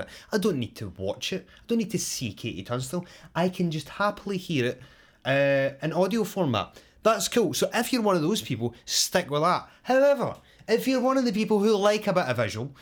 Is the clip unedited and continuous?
yes; 0 cuts

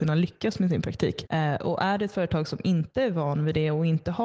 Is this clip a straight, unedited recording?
yes; 0 cuts

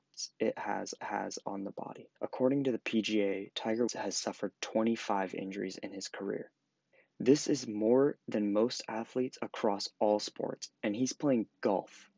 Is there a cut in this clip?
yes; 4 cuts; at 1.0 s, 2.2 s, 3.9 s, 6.9 s

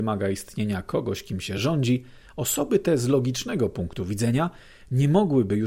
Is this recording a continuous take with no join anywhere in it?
yes; 0 cuts

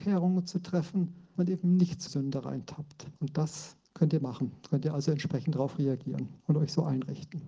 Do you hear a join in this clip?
yes; 5 cuts; at 1.4 s, 2.1 s, 3.2 s, 3.8 s, 6.4 s

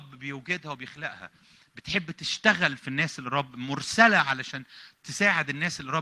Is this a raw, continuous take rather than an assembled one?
yes; 0 cuts

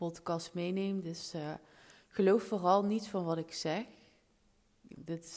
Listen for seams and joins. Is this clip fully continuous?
yes; 0 cuts

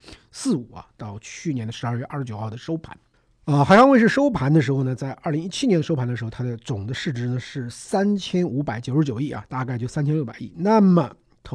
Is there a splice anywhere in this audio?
yes; 1 cut; at 3.1 s

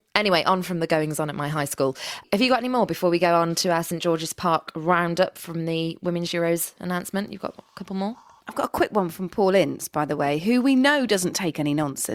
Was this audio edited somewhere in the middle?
no; 0 cuts

